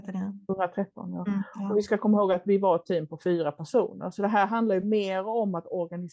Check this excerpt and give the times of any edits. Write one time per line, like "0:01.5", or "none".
none